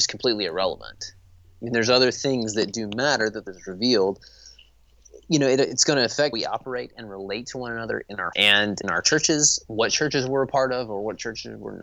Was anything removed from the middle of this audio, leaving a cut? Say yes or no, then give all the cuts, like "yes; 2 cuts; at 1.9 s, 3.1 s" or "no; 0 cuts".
yes; 4 cuts; at 3.5 s, 6.3 s, 8.3 s, 8.8 s